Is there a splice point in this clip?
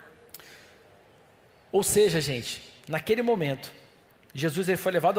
no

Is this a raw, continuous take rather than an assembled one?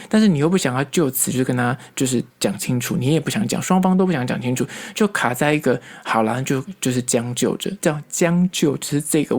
no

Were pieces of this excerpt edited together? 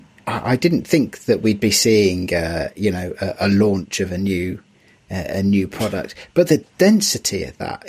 no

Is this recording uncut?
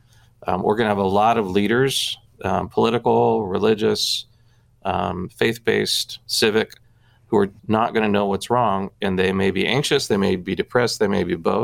no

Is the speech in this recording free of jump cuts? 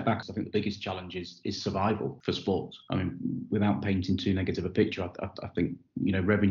yes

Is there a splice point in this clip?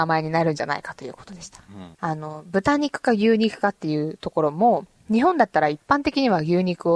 yes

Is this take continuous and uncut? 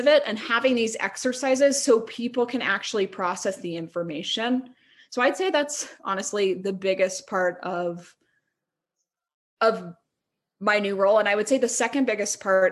yes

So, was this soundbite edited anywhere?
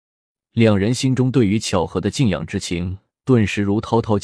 yes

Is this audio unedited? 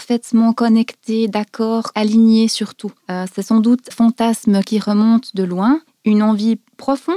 no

